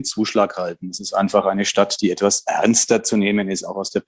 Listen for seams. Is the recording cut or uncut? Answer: uncut